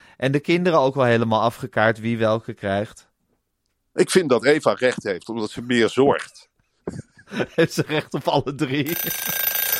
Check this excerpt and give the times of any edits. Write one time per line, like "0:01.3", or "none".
none